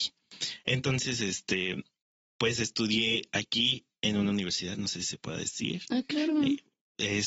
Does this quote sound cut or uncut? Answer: uncut